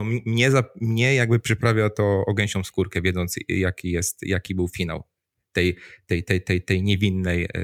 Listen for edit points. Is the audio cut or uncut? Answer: uncut